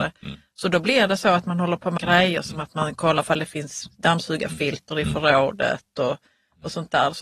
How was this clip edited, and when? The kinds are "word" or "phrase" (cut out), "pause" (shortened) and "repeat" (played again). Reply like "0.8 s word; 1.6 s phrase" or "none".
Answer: 2.0 s word